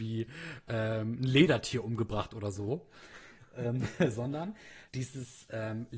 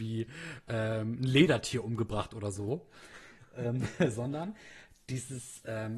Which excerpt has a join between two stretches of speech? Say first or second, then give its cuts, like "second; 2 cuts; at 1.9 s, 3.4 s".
first; 1 cut; at 4.9 s